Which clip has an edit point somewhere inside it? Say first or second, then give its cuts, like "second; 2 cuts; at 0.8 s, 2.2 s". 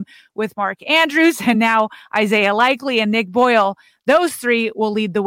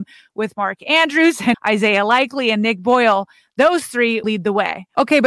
second; 2 cuts; at 1.5 s, 4.2 s